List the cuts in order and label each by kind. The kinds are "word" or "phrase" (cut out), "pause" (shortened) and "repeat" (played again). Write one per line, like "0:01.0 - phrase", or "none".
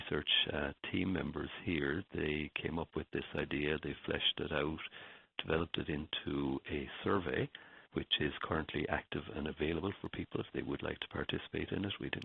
0:07.9 - pause